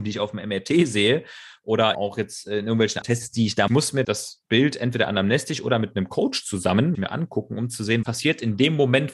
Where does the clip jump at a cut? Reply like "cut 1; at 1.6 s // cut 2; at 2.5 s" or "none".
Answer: cut 1; at 1.9 s // cut 2; at 3.0 s // cut 3; at 3.7 s // cut 4; at 4.0 s // cut 5; at 6.9 s // cut 6; at 8.0 s